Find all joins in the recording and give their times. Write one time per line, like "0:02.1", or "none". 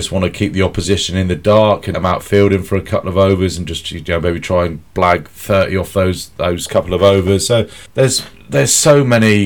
0:01.9
0:07.9